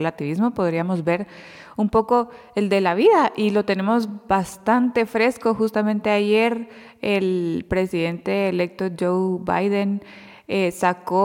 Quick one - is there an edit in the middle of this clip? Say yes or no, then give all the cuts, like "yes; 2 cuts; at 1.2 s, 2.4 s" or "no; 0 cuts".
no; 0 cuts